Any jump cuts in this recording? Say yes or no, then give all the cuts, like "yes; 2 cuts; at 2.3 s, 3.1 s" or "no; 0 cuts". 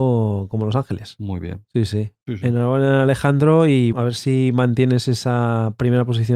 yes; 1 cut; at 3.9 s